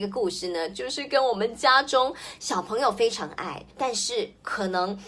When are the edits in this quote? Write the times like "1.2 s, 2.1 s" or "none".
3.7 s